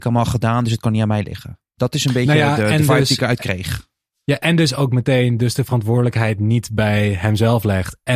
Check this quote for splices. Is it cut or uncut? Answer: uncut